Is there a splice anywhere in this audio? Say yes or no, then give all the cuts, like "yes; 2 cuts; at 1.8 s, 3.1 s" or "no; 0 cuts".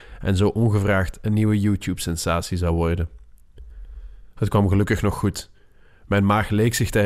no; 0 cuts